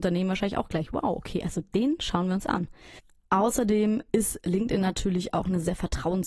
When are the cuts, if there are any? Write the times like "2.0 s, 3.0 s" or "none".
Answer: none